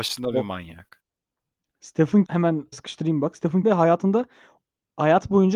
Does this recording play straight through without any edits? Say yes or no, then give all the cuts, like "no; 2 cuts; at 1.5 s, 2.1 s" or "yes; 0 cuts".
no; 3 cuts; at 2.3 s, 2.7 s, 3.6 s